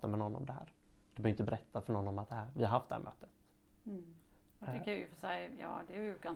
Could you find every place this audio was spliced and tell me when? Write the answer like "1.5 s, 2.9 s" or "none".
none